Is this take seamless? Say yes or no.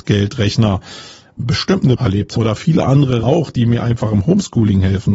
no